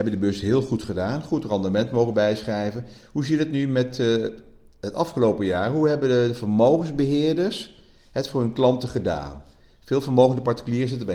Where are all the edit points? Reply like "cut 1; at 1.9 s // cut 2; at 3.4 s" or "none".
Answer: none